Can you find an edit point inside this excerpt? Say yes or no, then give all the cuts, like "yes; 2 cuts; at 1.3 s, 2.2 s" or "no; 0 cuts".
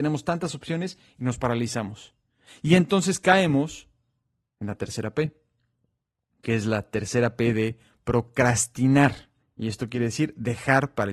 yes; 1 cut; at 9.4 s